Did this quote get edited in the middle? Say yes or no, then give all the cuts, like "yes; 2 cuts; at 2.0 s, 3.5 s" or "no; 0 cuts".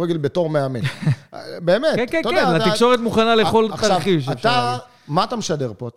no; 0 cuts